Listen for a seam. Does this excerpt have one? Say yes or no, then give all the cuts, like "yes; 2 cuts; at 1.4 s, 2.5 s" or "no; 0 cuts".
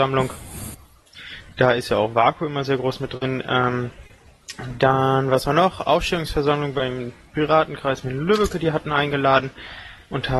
no; 0 cuts